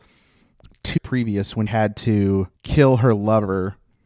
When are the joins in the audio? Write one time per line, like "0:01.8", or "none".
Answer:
0:01.0
0:01.7
0:02.5